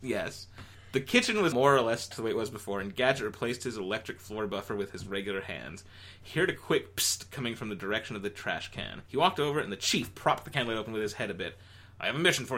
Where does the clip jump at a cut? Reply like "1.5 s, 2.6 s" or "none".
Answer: 1.5 s, 2.1 s, 9.1 s